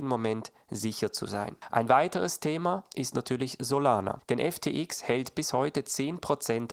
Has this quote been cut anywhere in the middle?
no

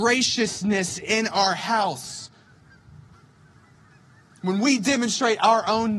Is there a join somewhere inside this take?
no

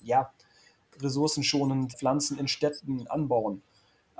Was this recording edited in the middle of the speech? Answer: yes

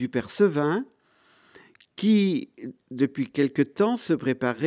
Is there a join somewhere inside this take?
no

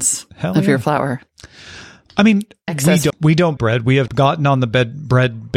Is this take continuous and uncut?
no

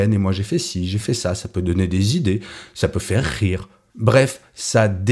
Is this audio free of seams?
yes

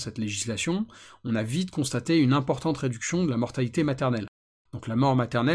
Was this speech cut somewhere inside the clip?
no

